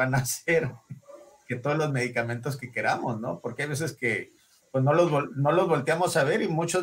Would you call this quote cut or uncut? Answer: uncut